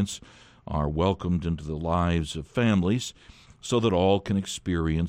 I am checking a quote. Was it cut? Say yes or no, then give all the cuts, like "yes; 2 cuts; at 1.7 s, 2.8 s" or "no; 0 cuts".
no; 0 cuts